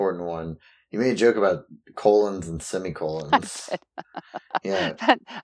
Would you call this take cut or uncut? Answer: uncut